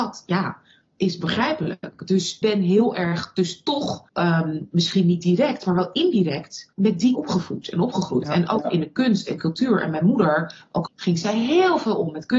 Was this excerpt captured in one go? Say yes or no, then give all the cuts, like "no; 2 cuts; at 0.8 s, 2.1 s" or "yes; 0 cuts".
no; 5 cuts; at 2.4 s, 4.1 s, 6.7 s, 7.1 s, 10.9 s